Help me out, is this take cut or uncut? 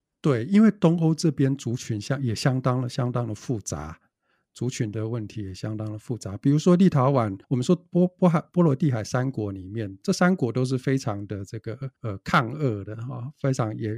cut